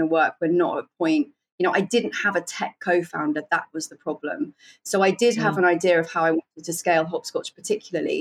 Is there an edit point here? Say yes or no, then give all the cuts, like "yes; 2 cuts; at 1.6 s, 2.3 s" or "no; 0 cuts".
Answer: no; 0 cuts